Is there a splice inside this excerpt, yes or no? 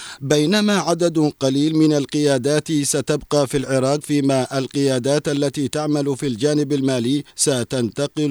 yes